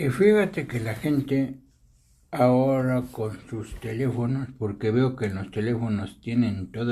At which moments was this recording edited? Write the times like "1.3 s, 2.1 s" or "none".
none